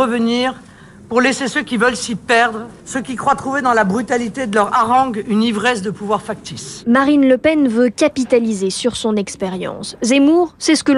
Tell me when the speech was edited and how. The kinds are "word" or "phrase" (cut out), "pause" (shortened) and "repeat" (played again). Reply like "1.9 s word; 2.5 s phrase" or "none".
2.8 s pause